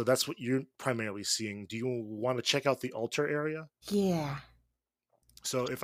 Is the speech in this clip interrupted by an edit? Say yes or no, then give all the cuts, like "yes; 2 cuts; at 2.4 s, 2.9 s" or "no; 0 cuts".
yes; 1 cut; at 3.8 s